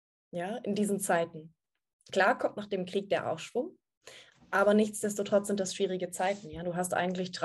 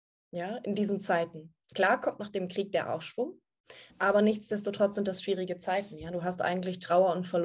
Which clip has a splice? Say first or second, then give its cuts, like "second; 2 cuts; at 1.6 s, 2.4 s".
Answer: second; 2 cuts; at 1.6 s, 3.9 s